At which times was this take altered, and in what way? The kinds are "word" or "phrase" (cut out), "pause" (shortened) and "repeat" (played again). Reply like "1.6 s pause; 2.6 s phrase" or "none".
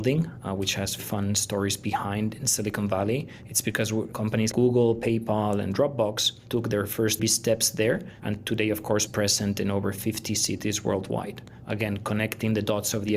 1.0 s word; 4.5 s word; 7.2 s word; 9.1 s phrase